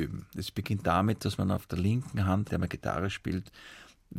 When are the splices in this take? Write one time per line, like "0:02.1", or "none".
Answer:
0:02.5